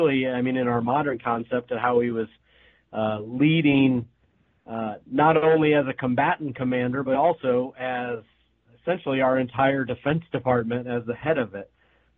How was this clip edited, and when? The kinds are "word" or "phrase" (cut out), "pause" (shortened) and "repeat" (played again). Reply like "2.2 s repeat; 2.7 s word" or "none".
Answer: none